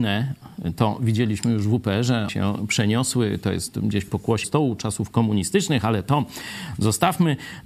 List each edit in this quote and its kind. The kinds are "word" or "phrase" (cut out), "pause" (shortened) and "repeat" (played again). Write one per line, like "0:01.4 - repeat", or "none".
0:02.3 - word
0:04.4 - phrase